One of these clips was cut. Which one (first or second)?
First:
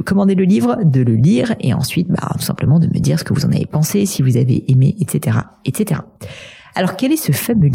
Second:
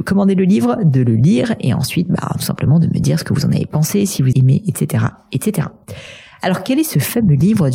second